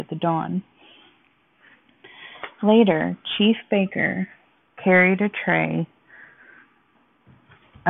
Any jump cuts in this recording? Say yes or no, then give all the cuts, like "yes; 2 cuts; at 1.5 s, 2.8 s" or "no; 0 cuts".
no; 0 cuts